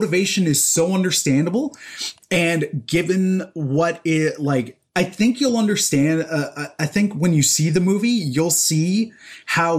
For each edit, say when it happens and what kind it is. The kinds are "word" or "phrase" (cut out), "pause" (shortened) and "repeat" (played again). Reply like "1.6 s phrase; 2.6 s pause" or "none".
4.9 s pause